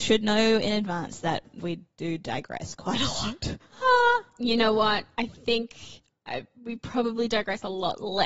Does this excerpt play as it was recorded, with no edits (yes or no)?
no